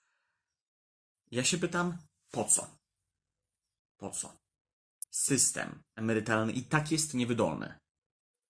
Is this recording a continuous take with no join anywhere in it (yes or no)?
yes